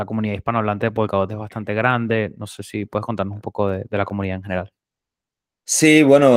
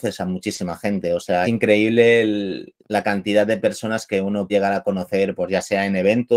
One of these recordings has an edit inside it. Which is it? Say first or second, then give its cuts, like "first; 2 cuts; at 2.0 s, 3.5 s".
second; 3 cuts; at 1.4 s, 2.8 s, 4.5 s